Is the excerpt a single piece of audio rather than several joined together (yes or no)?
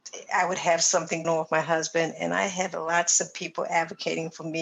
no